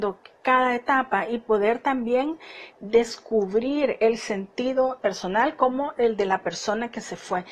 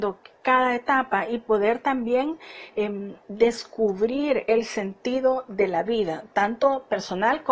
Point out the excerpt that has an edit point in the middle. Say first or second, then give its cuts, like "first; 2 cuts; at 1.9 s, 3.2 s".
first; 2 cuts; at 2.7 s, 5.0 s